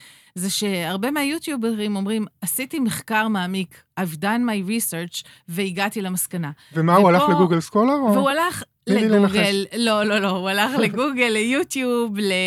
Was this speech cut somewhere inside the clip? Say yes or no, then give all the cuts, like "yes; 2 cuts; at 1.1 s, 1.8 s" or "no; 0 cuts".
no; 0 cuts